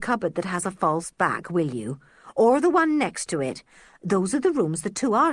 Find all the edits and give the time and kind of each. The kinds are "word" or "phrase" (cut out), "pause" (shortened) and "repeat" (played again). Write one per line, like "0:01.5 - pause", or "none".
none